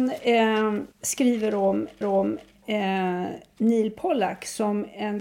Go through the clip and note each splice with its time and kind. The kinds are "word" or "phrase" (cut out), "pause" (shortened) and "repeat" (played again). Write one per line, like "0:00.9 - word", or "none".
0:00.9 - pause
0:02.0 - repeat